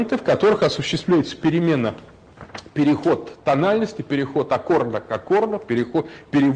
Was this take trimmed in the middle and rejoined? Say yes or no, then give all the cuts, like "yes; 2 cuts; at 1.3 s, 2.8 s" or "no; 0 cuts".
no; 0 cuts